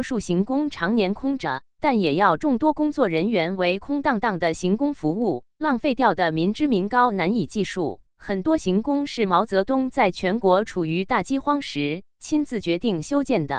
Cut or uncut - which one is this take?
cut